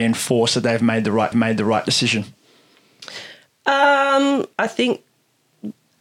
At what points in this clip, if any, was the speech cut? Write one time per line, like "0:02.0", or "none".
0:01.3
0:04.5